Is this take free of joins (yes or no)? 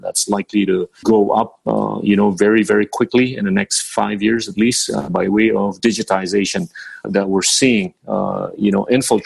no